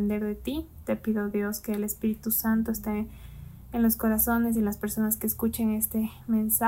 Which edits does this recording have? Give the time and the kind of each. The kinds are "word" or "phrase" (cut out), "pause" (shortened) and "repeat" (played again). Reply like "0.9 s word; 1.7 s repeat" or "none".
none